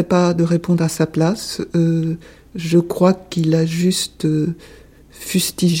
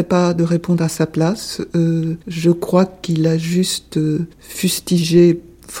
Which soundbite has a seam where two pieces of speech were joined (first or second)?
second